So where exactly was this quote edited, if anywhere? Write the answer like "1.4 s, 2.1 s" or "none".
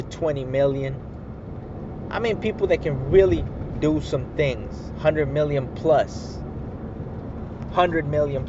none